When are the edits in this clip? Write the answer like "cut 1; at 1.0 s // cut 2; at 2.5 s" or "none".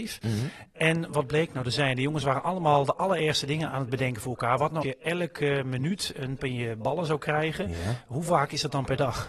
cut 1; at 3.7 s // cut 2; at 4.8 s // cut 3; at 6.4 s

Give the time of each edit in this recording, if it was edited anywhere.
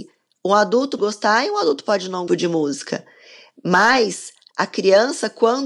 cut 1; at 1.0 s // cut 2; at 2.3 s

